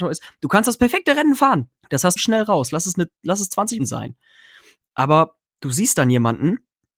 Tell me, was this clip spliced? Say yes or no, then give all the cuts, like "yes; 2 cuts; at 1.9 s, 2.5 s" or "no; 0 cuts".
yes; 3 cuts; at 1.8 s, 2.2 s, 3.8 s